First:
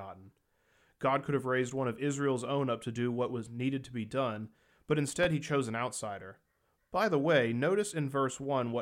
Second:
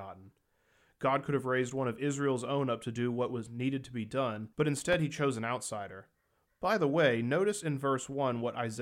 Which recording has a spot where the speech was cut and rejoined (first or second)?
second